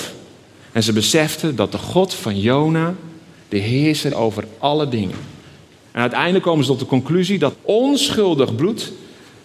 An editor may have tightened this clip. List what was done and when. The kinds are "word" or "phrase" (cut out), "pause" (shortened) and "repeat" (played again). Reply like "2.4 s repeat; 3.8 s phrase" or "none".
4.1 s word; 7.5 s word